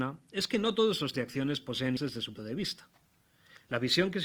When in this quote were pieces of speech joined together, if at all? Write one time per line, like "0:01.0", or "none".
0:01.1
0:02.0
0:02.4